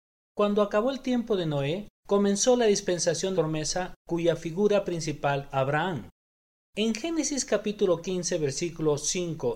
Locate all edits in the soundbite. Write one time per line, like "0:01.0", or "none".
0:01.9
0:03.3
0:05.5